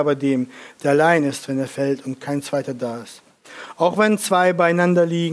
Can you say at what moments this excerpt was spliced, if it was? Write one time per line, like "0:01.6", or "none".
none